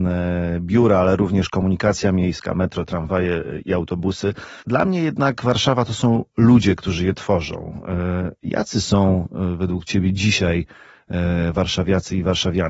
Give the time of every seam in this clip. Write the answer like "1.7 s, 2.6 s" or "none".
4.6 s

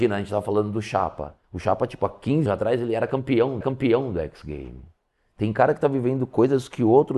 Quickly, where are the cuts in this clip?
1.4 s, 2.5 s, 3.6 s

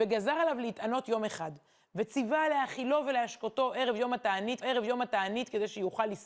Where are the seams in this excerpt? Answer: 4.6 s

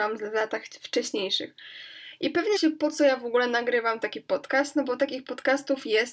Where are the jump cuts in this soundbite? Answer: 2.6 s

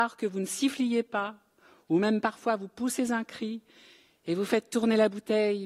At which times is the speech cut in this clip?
none

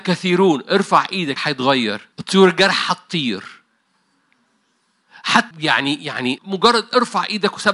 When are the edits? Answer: 1.4 s, 2.1 s, 5.5 s, 6.4 s

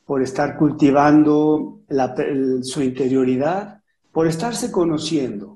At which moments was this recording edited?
none

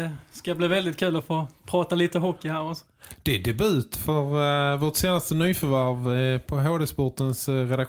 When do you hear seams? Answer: none

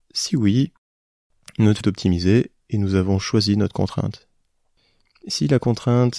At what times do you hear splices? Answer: 1.8 s

